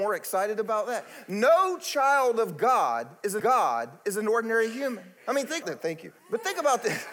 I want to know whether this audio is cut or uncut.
cut